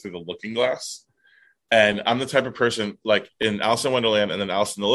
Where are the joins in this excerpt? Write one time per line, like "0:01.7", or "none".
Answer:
none